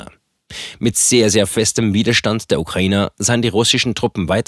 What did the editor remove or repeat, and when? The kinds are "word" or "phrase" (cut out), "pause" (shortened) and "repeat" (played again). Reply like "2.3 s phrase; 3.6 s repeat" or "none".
none